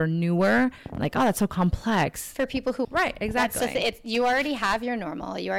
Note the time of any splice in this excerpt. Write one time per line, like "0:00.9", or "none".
0:02.8